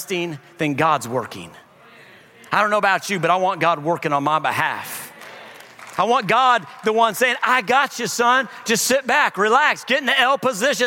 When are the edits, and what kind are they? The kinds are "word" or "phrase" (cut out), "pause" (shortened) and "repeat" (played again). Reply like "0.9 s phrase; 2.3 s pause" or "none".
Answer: none